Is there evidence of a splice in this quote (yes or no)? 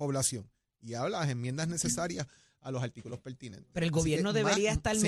no